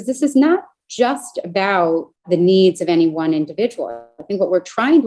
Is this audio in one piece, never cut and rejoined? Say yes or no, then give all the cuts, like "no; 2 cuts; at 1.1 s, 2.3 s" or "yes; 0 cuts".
no; 1 cut; at 2.2 s